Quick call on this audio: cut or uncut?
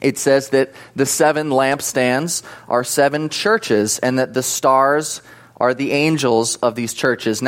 uncut